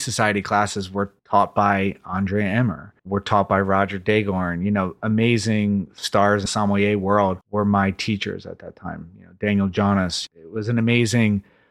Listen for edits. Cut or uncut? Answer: cut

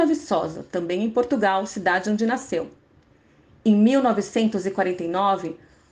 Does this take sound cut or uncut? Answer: uncut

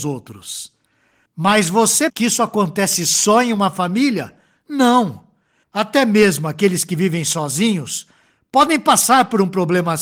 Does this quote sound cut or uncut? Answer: cut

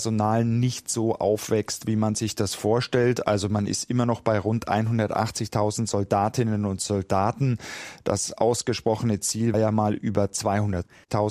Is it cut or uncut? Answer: cut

